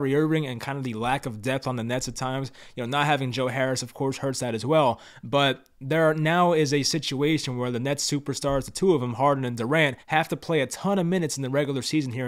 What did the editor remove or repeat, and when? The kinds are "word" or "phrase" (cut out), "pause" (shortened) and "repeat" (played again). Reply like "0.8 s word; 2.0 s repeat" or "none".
10.0 s pause